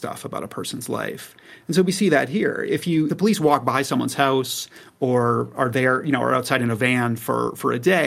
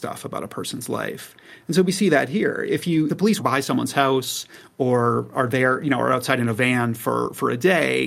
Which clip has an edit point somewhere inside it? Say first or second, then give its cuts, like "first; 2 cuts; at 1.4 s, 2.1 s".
second; 1 cut; at 3.4 s